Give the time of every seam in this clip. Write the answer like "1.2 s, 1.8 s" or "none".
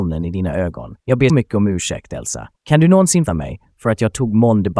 1.0 s, 1.3 s, 2.6 s, 3.3 s